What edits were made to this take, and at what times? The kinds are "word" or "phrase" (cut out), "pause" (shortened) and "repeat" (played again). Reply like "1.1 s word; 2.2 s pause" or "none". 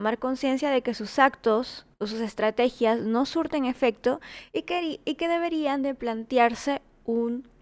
1.9 s pause